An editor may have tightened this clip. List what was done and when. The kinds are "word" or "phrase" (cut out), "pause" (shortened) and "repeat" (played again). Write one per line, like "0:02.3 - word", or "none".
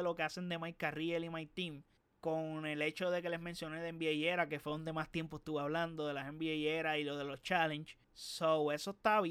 0:02.0 - pause
0:08.0 - pause